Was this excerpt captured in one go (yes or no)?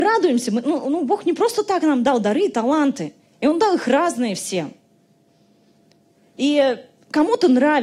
yes